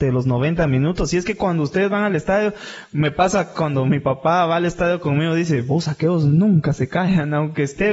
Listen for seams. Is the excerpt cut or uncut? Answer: uncut